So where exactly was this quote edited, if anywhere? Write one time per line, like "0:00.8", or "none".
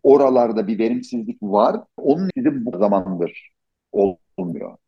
0:02.0
0:02.3
0:02.7